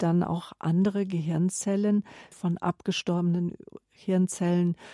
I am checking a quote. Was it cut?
yes; 1 cut; at 2.3 s

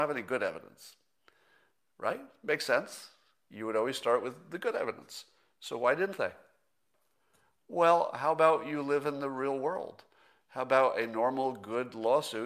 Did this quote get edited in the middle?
no; 0 cuts

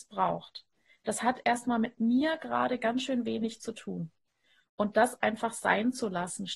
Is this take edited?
no; 0 cuts

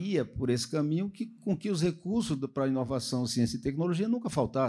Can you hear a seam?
no; 0 cuts

